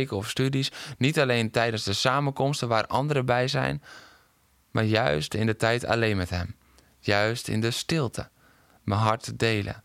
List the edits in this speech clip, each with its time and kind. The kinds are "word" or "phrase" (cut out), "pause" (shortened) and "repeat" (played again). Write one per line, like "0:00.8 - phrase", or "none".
none